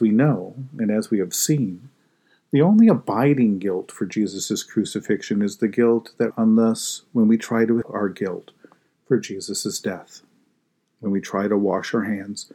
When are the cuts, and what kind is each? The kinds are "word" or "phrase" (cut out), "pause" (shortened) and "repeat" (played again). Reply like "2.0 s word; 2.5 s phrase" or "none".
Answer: 6.3 s word; 7.8 s word